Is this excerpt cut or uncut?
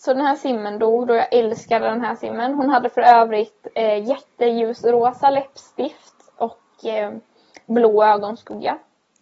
uncut